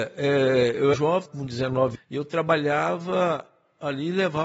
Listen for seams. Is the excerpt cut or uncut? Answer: cut